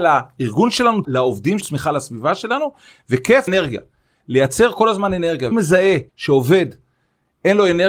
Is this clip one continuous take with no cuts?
no; 5 cuts; at 1.0 s, 1.6 s, 3.5 s, 5.5 s, 6.1 s

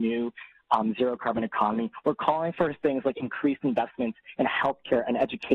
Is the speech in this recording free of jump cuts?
yes; 0 cuts

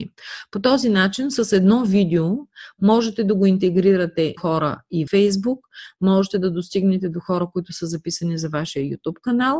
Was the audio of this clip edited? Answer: yes; 2 cuts; at 4.4 s, 5.1 s

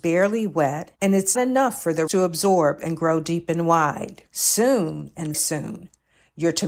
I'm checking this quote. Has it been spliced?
yes; 5 cuts; at 1.0 s, 1.3 s, 2.1 s, 4.3 s, 5.3 s

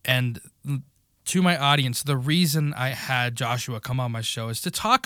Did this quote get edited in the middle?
no; 0 cuts

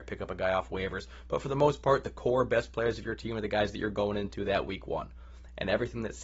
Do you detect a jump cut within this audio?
no; 0 cuts

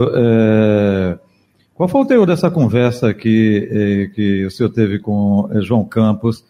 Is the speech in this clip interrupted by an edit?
no; 0 cuts

